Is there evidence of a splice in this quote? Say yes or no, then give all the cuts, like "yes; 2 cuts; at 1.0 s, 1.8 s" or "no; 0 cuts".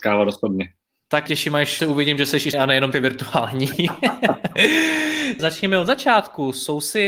yes; 5 cuts; at 1.3 s, 1.8 s, 2.5 s, 2.9 s, 5.4 s